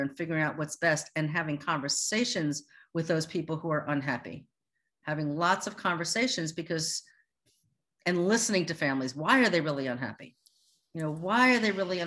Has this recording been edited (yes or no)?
no